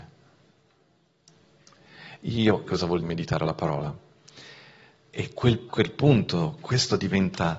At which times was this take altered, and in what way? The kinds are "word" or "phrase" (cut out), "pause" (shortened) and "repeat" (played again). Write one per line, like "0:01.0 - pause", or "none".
0:02.7 - word
0:03.0 - word
0:05.7 - word